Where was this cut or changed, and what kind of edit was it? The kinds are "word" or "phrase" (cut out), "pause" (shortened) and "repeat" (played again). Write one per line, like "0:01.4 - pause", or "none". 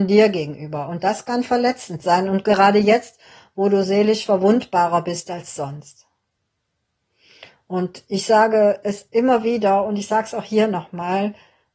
none

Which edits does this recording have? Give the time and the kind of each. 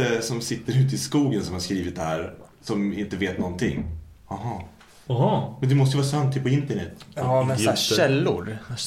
none

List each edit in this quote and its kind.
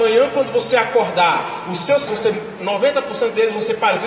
0:02.1 - word
0:02.6 - word

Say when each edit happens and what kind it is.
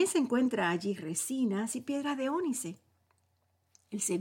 0:01.7 - word

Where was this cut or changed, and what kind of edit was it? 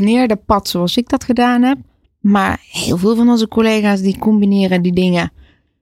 none

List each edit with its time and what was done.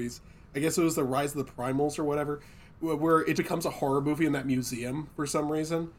0:03.3 - word

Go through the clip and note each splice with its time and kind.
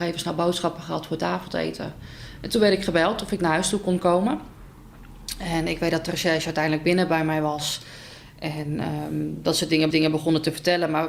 0:09.9 - repeat

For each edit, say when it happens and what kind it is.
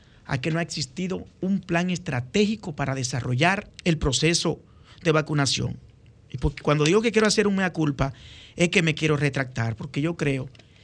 0:01.3 - pause
0:03.8 - pause

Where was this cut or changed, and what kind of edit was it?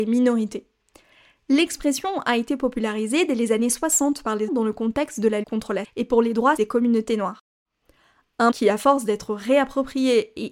0:04.5 - word
0:05.4 - word
0:05.8 - word
0:06.6 - word
0:08.5 - word

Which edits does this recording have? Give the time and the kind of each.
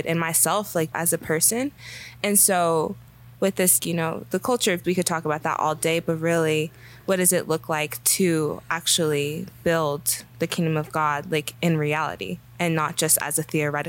0:00.9 - word
0:03.8 - word
0:04.8 - word

